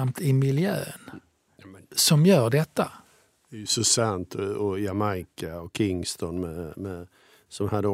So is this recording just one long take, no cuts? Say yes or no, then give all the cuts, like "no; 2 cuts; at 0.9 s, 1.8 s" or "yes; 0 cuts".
yes; 0 cuts